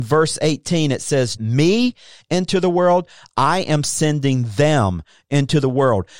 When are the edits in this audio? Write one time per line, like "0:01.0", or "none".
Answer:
0:01.4